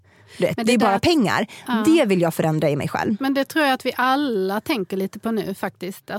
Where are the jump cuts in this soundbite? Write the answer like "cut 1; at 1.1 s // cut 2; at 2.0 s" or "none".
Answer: none